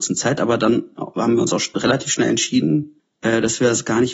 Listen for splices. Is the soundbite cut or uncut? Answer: cut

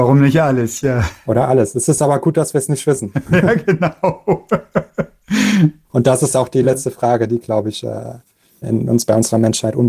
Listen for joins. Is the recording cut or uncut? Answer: cut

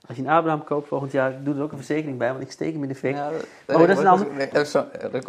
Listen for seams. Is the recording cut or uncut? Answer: uncut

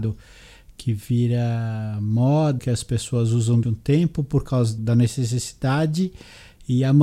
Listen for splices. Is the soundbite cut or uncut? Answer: cut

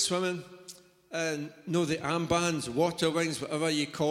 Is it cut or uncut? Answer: uncut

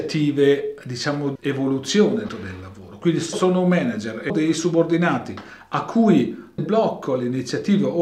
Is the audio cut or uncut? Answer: cut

